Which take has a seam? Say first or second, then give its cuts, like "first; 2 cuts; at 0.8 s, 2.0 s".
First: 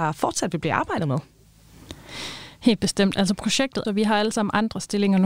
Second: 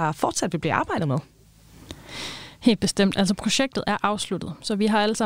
first; 1 cut; at 3.8 s